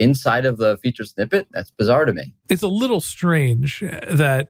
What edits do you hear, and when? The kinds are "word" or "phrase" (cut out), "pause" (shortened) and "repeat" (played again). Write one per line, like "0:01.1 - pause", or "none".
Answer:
none